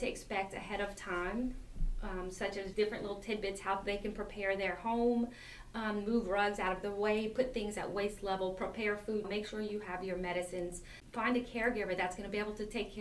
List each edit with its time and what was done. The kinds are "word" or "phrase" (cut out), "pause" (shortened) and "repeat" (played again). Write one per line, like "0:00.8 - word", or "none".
0:02.7 - word
0:09.2 - word